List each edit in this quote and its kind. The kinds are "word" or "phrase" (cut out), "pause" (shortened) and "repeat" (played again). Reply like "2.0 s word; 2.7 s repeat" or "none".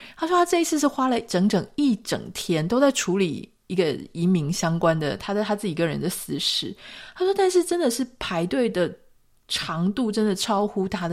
none